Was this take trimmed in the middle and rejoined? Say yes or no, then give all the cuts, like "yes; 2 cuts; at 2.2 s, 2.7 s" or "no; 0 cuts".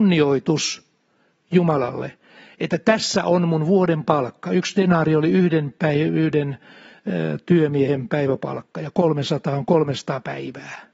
no; 0 cuts